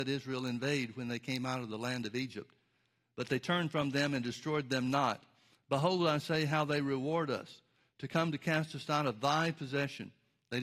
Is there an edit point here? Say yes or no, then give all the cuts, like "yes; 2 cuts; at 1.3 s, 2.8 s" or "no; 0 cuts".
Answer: no; 0 cuts